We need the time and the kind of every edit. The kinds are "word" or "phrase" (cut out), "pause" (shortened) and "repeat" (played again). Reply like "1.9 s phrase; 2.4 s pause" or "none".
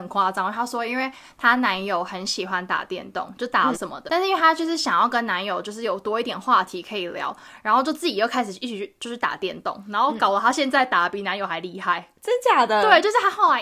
3.7 s word; 4.1 s word